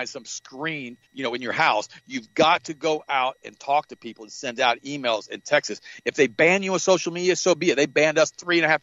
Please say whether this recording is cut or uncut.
cut